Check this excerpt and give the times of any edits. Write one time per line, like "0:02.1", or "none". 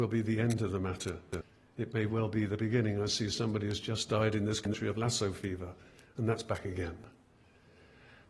none